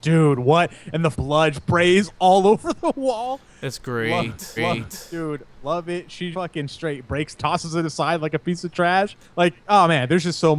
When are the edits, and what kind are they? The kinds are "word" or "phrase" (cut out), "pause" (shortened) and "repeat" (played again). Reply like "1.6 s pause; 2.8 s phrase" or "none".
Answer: 1.1 s word; 1.5 s word; 4.6 s repeat; 6.3 s word; 7.4 s phrase; 9.2 s pause

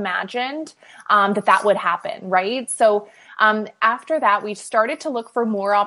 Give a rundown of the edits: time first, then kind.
none

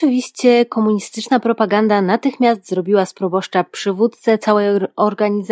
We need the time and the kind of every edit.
none

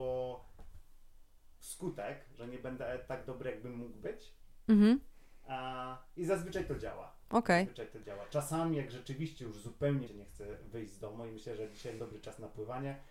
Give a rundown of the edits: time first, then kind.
7.2 s pause; 10.1 s word; 12.0 s word

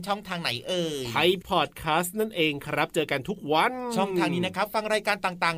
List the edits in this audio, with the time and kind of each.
1.4 s word

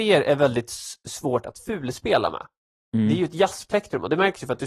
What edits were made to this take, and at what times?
none

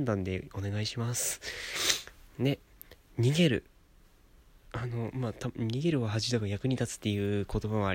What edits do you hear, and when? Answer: 2.3 s pause

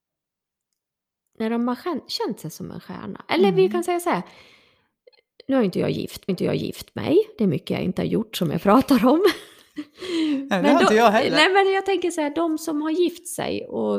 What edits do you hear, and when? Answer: 6.3 s repeat

